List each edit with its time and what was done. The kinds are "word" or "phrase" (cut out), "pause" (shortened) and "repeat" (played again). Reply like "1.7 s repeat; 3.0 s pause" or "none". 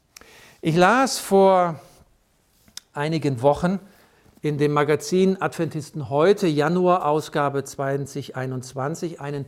none